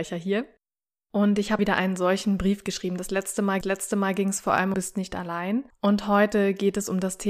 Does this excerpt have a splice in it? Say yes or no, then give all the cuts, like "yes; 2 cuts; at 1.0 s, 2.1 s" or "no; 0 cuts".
yes; 4 cuts; at 1.6 s, 3.6 s, 4.7 s, 5.7 s